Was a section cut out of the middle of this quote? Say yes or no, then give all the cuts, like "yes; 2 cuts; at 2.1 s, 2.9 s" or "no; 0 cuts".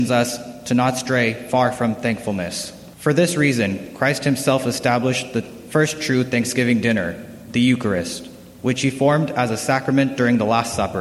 yes; 1 cut; at 2.9 s